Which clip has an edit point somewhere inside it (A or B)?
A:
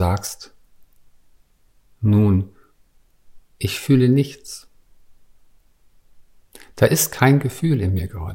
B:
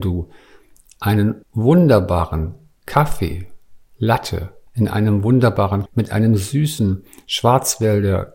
B